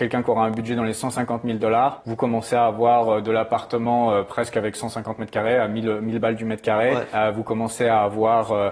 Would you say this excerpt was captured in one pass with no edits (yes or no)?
yes